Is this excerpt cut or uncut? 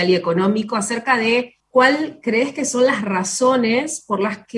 cut